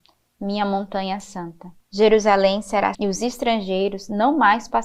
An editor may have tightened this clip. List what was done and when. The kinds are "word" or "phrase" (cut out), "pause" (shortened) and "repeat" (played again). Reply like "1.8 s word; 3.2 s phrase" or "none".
1.8 s pause; 2.9 s word